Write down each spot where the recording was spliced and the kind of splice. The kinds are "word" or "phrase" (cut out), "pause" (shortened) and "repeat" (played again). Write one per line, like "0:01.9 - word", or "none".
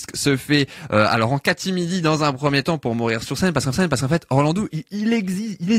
0:03.7 - repeat

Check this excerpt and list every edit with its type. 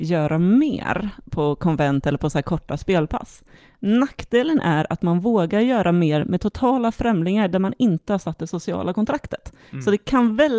none

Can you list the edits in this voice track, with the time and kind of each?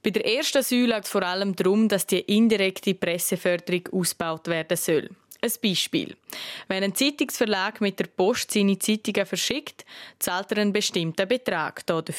0:01.0 - word

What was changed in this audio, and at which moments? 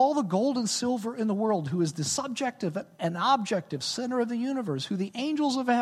none

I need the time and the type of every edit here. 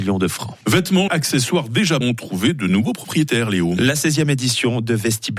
0:01.1 - phrase
0:02.0 - word

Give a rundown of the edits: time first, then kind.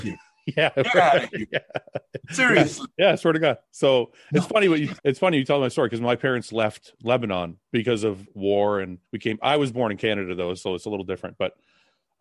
0:03.6 - pause
0:05.0 - pause
0:07.6 - pause
0:09.1 - pause

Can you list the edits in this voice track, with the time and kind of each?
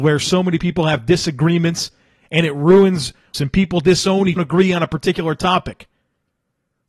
0:03.3 - word
0:04.4 - phrase

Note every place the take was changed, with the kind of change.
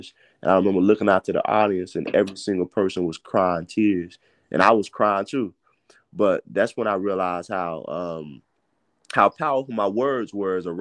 none

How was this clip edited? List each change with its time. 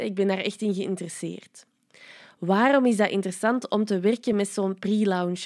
none

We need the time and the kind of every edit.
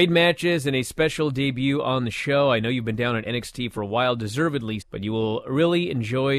0:04.8 - word

